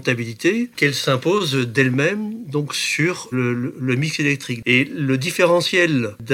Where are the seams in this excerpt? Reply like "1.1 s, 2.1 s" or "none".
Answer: 3.3 s